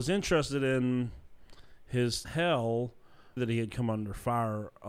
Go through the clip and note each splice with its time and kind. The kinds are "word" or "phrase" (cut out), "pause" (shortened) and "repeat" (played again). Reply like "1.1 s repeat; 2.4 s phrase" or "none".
2.2 s phrase; 3.4 s phrase